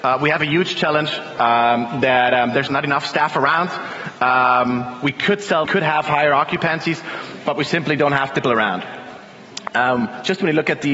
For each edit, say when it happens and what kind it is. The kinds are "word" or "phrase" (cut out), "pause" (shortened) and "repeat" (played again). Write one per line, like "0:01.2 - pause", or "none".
0:02.7 - word
0:05.7 - phrase
0:08.4 - word